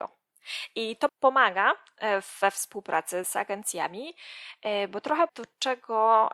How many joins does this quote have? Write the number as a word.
three